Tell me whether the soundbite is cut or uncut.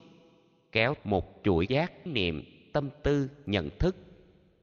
cut